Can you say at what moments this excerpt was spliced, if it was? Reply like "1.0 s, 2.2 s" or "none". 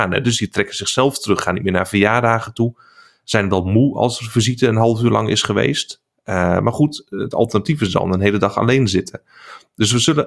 none